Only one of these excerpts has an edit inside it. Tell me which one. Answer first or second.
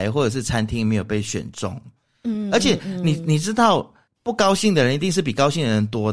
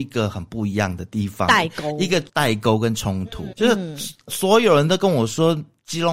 second